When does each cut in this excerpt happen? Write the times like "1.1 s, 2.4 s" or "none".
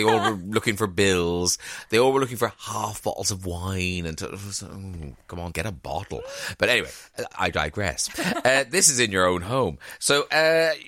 5.5 s